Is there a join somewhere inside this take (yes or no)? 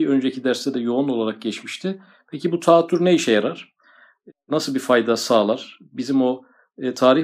no